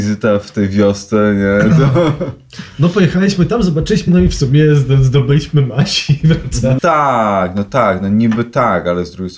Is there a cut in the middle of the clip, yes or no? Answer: yes